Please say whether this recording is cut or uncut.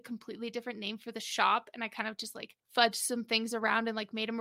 cut